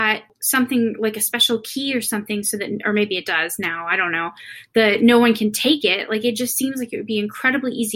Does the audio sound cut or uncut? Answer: uncut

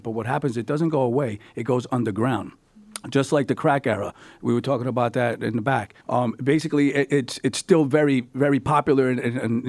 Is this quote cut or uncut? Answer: cut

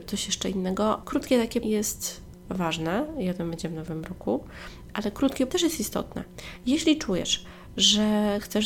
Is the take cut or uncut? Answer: cut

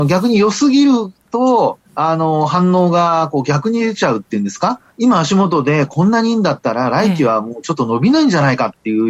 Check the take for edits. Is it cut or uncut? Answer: cut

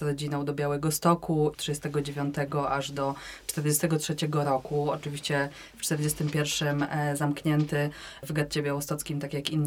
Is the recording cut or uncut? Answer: cut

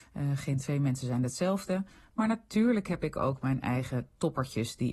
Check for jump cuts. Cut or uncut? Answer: uncut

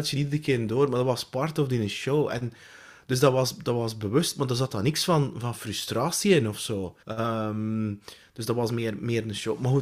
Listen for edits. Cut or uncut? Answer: cut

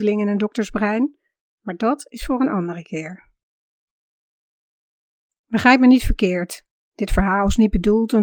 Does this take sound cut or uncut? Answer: uncut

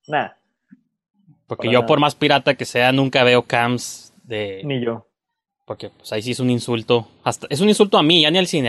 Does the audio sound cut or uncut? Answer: uncut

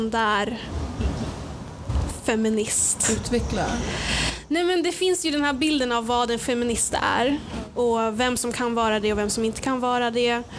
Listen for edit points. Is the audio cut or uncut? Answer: uncut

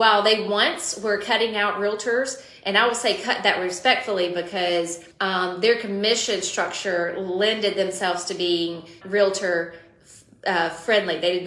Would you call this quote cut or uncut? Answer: cut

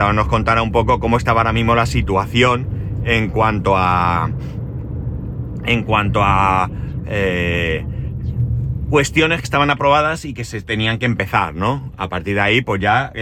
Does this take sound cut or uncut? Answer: cut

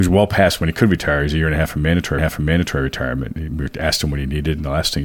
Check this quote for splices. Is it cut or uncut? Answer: cut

